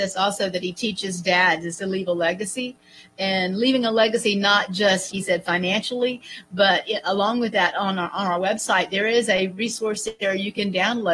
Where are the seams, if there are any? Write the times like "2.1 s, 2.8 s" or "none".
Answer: 5.1 s